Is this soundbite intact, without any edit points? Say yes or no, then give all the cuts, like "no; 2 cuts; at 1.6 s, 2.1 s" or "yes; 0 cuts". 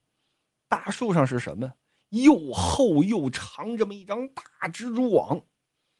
yes; 0 cuts